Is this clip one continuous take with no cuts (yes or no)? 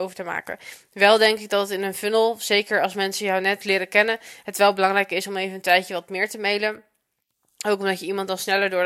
yes